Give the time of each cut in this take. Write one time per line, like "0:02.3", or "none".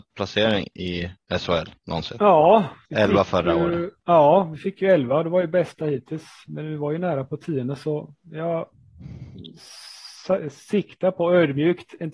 none